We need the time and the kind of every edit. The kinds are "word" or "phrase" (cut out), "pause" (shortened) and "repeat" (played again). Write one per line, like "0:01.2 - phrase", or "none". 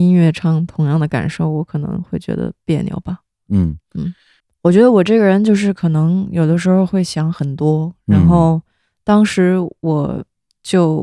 none